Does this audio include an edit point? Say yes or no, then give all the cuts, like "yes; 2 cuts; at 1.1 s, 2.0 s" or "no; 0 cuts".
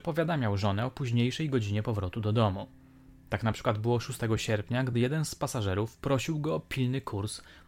no; 0 cuts